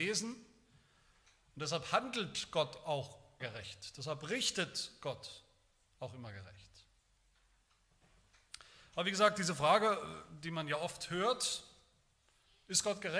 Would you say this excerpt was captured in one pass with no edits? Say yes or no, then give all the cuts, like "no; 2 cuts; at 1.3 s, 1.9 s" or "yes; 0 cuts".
no; 1 cut; at 3.4 s